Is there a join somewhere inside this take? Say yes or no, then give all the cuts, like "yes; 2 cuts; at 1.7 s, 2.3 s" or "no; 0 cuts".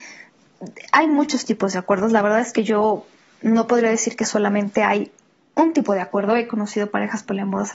no; 0 cuts